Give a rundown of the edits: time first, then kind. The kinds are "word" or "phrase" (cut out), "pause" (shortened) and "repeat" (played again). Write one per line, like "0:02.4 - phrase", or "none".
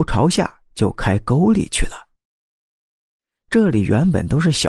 none